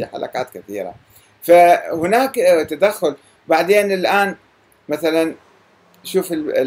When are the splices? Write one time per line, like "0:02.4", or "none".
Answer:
none